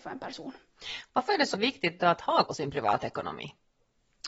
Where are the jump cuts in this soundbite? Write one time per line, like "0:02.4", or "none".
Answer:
0:01.5
0:02.4